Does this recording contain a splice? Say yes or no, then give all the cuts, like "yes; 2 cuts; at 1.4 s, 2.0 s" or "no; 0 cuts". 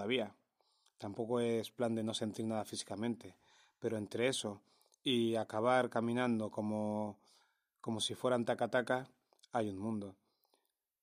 no; 0 cuts